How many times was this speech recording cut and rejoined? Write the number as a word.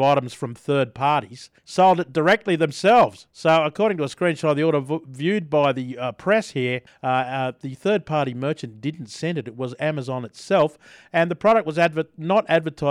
three